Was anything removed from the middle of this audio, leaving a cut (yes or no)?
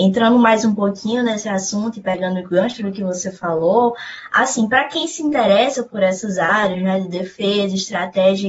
no